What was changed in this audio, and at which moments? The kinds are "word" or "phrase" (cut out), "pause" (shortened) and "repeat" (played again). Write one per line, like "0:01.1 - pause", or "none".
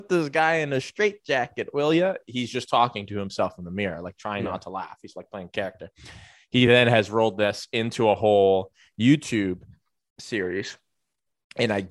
none